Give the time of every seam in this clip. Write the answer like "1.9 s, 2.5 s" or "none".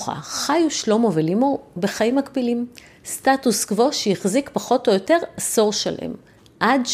none